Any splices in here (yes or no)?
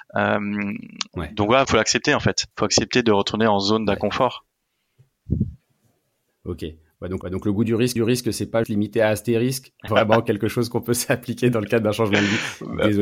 yes